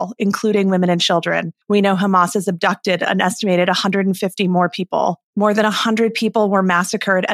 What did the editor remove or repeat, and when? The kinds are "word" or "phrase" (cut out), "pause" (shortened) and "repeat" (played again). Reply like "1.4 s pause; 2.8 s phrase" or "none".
1.6 s pause; 5.3 s pause